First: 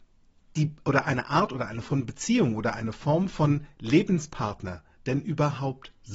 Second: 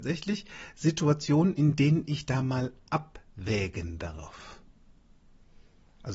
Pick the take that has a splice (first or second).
first